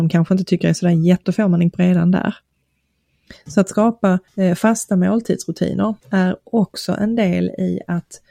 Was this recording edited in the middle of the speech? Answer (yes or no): yes